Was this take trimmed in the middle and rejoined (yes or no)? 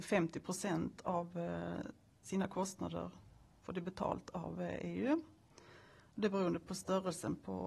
no